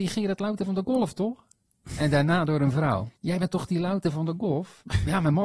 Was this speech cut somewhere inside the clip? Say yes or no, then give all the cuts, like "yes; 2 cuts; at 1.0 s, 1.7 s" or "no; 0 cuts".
yes; 1 cut; at 3.2 s